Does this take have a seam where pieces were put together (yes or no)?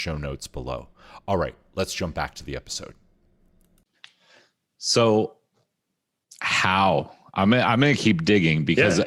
no